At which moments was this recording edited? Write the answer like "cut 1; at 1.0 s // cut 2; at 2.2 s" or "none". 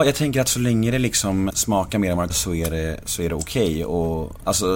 cut 1; at 1.5 s // cut 2; at 2.3 s